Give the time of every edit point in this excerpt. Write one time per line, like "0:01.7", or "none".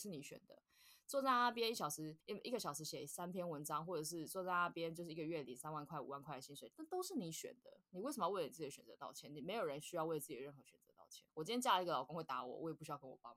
0:02.2
0:11.3